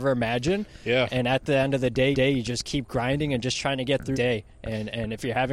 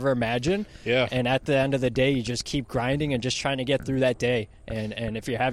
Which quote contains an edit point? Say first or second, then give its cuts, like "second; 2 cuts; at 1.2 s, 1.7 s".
first; 2 cuts; at 2.1 s, 4.1 s